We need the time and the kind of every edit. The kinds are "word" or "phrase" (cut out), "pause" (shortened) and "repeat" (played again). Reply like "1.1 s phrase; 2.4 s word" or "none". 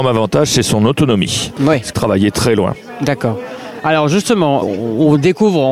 1.9 s phrase; 4.6 s word